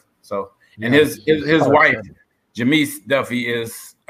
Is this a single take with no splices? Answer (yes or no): yes